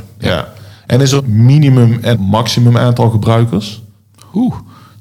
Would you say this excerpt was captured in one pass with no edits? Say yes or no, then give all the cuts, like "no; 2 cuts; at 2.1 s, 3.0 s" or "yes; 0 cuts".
no; 2 cuts; at 1.2 s, 2.1 s